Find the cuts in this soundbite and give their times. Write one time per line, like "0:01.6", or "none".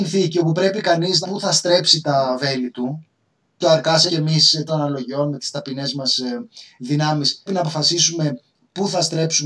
0:01.2
0:03.6
0:04.1
0:04.7
0:07.5